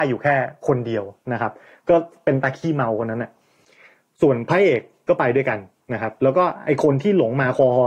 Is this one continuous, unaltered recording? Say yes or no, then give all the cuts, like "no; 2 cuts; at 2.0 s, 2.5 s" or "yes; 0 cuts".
yes; 0 cuts